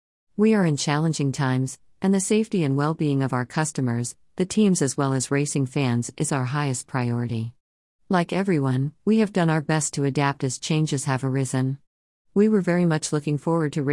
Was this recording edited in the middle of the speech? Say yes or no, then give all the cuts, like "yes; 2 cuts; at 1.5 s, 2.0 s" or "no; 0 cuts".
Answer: no; 0 cuts